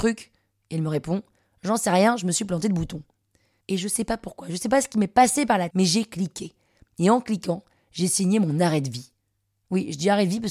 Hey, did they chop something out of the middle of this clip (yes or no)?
yes